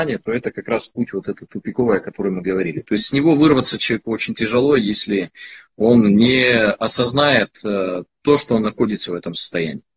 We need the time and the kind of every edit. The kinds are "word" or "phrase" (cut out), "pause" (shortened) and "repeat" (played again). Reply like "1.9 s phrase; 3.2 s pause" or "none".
none